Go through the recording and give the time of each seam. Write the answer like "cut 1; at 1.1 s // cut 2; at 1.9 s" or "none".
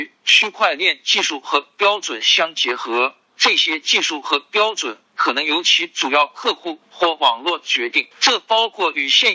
cut 1; at 8.1 s